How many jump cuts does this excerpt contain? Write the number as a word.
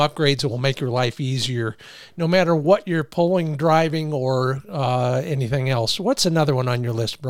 zero